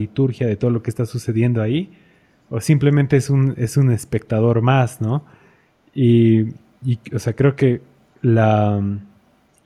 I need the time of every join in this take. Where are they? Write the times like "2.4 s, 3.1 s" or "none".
none